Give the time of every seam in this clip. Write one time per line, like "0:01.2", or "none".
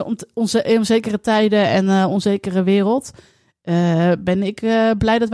none